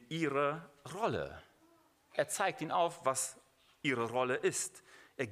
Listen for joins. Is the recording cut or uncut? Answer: uncut